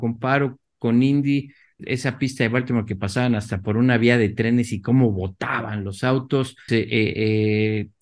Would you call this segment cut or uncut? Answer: cut